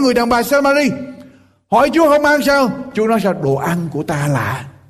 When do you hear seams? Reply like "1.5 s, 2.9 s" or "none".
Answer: none